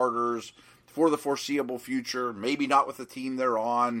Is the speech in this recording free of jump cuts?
yes; 0 cuts

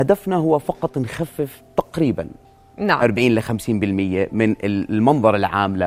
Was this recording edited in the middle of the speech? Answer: no; 0 cuts

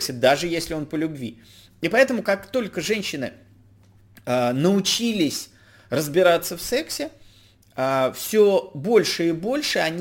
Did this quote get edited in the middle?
no; 0 cuts

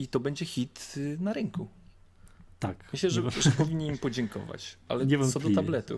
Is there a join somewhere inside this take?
yes; 1 cut; at 4.8 s

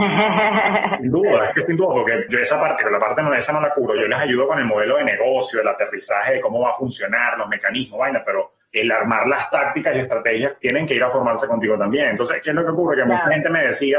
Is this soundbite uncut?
no; 3 cuts; at 2.3 s, 2.8 s, 4.0 s

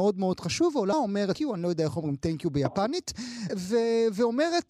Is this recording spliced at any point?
yes; 3 cuts; at 0.9 s, 1.3 s, 3.5 s

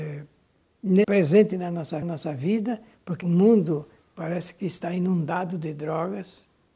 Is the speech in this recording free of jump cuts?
no; 3 cuts; at 1.0 s, 2.0 s, 3.2 s

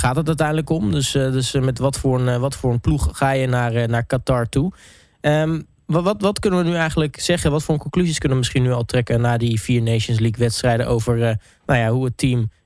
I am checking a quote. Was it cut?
no; 0 cuts

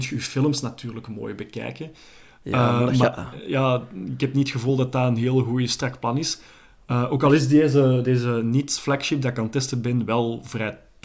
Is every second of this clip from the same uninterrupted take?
yes; 0 cuts

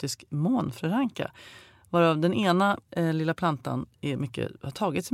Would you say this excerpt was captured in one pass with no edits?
no; 1 cut; at 2.8 s

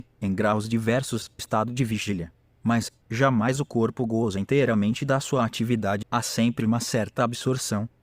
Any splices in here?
yes; 3 cuts; at 1.4 s, 3.0 s, 6.0 s

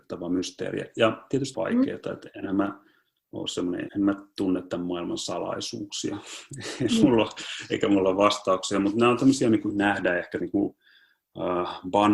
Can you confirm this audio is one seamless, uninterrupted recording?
no; 4 cuts; at 1.5 s, 3.9 s, 9.7 s, 10.4 s

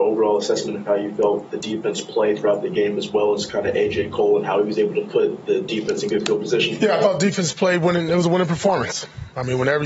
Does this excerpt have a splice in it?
no; 0 cuts

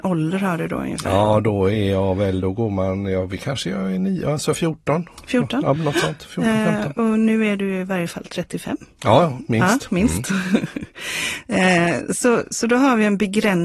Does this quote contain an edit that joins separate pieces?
no; 0 cuts

